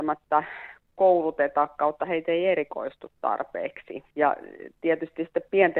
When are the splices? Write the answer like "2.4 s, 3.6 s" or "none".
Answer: 4.1 s